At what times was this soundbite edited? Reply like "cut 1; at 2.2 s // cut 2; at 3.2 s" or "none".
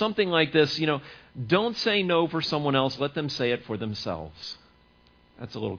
none